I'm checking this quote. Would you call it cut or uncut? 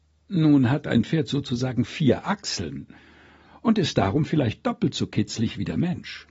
uncut